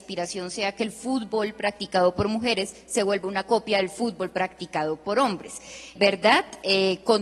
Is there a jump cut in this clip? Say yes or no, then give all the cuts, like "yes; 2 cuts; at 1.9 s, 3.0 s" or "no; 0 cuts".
yes; 1 cut; at 6.0 s